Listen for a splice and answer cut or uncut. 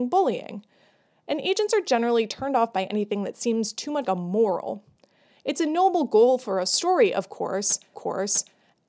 cut